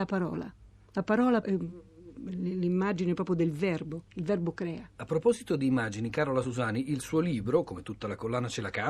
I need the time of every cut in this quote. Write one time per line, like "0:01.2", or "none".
0:01.4
0:04.1
0:04.9